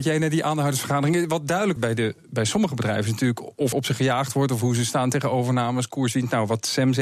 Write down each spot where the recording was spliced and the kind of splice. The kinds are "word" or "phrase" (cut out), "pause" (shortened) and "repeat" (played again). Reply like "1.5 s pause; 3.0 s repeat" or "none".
1.8 s word; 3.7 s word